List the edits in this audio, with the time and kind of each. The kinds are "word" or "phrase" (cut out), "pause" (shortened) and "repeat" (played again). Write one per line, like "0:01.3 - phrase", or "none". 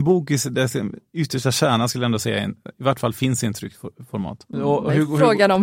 none